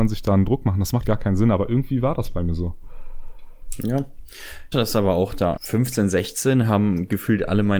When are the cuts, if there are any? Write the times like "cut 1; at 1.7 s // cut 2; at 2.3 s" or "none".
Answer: cut 1; at 1.0 s // cut 2; at 4.7 s // cut 3; at 5.6 s